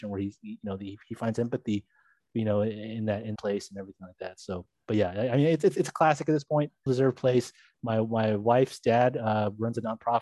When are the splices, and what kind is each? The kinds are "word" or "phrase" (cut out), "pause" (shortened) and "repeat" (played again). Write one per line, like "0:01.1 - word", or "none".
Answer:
0:03.4 - word
0:06.9 - word